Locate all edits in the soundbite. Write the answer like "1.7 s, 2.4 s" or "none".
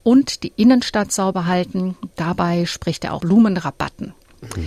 3.2 s